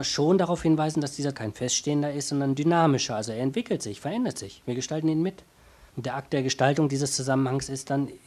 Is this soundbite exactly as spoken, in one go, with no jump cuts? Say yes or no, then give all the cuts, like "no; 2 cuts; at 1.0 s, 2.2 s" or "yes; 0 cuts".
no; 2 cuts; at 1.3 s, 5.9 s